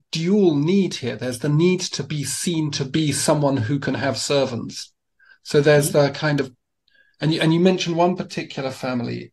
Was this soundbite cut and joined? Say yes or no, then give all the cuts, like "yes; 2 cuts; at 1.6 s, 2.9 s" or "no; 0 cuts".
no; 0 cuts